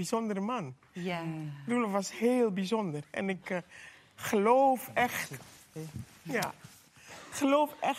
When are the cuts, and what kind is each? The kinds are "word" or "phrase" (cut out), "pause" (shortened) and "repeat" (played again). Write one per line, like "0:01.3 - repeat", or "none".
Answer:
none